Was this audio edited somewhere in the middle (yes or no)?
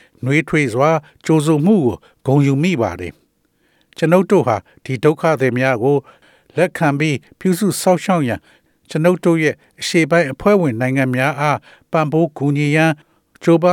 no